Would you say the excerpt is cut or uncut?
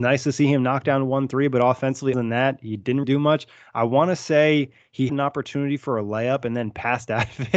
cut